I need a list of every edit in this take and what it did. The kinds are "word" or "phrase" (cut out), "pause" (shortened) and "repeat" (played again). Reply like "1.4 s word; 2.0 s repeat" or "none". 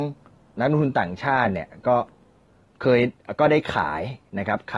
2.5 s pause